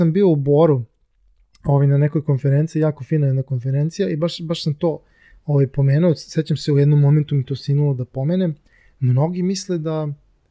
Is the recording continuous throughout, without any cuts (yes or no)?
yes